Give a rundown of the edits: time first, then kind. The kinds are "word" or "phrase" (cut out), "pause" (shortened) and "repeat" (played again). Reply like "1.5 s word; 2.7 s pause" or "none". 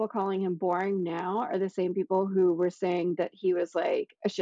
none